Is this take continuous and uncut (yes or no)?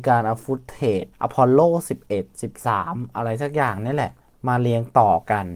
no